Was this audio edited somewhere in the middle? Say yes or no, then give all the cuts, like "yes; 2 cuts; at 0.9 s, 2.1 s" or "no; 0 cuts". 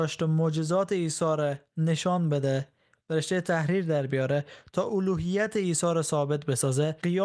no; 0 cuts